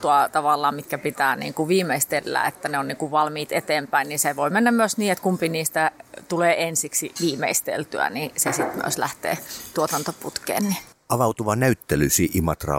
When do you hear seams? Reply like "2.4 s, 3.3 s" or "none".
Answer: none